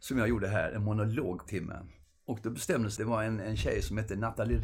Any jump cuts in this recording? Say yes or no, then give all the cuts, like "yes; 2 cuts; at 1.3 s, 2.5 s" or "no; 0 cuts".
yes; 2 cuts; at 1.5 s, 3.0 s